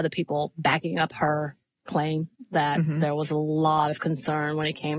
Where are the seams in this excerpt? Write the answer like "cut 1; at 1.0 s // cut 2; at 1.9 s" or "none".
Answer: none